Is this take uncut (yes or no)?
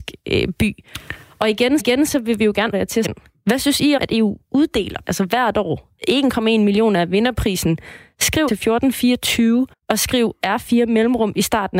no